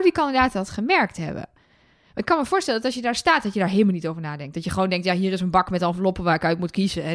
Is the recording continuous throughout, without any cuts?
yes; 0 cuts

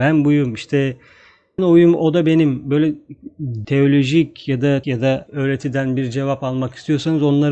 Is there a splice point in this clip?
yes; 4 cuts; at 1.6 s, 3.6 s, 4.8 s, 5.3 s

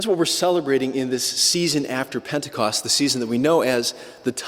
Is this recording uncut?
yes; 0 cuts

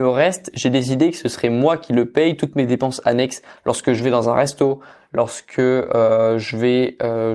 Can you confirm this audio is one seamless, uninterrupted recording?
yes; 0 cuts

